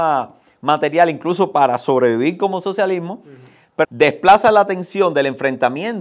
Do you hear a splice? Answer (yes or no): yes